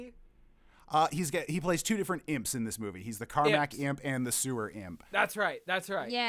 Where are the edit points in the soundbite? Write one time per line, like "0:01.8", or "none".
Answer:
none